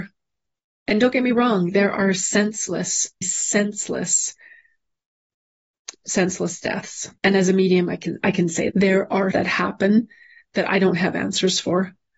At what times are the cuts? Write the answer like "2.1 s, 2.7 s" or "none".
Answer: 3.2 s, 7.2 s, 8.7 s, 9.3 s

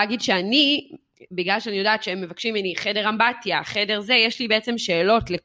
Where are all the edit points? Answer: none

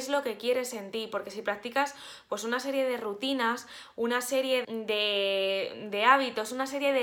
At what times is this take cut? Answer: 4.6 s

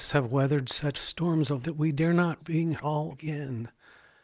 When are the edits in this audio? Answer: 0.9 s, 1.6 s, 2.4 s, 2.8 s, 3.1 s

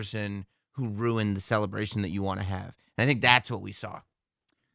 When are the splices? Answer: none

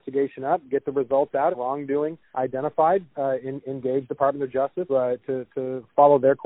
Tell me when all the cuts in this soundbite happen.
1.5 s, 2.3 s, 4.9 s

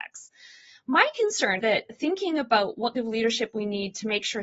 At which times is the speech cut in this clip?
1.6 s, 2.9 s

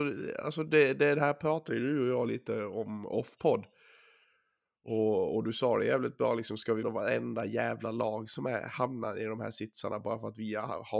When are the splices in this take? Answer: 6.8 s

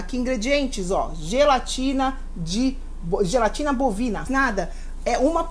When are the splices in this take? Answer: 4.3 s

